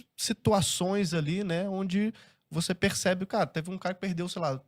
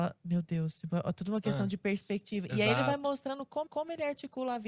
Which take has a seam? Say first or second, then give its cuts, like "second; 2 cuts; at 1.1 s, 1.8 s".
second; 1 cut; at 3.7 s